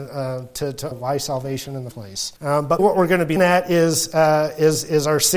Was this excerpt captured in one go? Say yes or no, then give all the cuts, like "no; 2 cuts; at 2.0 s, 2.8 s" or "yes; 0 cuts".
no; 5 cuts; at 0.9 s, 1.9 s, 2.4 s, 2.8 s, 3.4 s